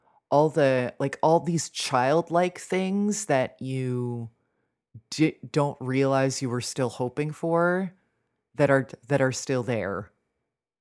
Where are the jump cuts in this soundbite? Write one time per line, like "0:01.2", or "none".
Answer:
none